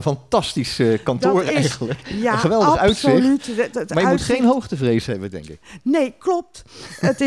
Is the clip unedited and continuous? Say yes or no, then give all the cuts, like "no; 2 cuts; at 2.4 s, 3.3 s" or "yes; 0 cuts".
yes; 0 cuts